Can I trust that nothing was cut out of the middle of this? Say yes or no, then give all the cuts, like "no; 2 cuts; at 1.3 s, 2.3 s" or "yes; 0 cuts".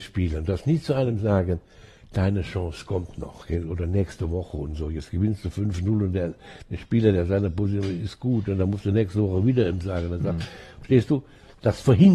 yes; 0 cuts